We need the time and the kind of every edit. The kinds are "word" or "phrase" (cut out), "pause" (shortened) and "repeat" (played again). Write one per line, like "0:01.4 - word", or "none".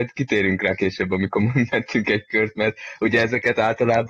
none